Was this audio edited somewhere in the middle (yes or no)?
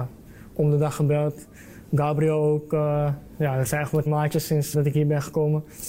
yes